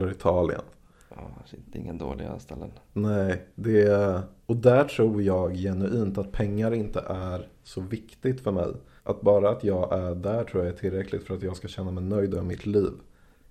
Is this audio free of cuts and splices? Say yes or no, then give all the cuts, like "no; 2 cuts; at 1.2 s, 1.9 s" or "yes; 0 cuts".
no; 1 cut; at 9.0 s